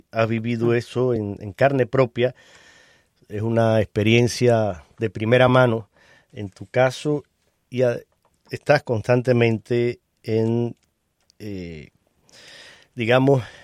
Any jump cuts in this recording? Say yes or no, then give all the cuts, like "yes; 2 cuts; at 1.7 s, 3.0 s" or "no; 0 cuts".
no; 0 cuts